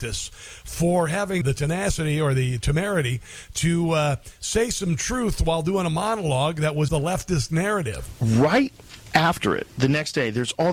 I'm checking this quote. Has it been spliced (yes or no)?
yes